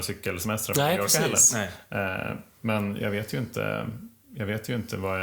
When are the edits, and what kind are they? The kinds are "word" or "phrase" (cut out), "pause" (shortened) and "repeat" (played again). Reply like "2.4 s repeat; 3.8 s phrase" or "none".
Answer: 3.0 s word